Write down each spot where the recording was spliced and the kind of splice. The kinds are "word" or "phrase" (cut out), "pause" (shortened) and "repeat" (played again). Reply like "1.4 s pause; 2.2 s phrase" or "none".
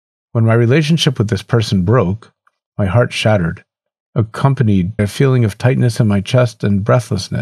5.0 s word